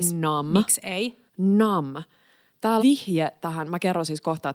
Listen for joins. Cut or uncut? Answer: cut